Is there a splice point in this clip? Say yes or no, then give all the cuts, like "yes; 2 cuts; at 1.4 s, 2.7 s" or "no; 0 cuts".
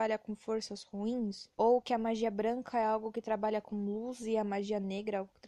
yes; 1 cut; at 1.5 s